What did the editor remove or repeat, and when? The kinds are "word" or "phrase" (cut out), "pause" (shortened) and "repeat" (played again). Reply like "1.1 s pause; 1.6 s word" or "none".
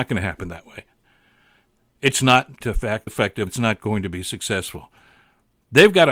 2.6 s word; 3.1 s word; 3.5 s word